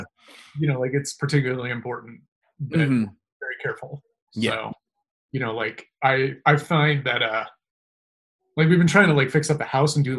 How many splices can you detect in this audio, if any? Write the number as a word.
zero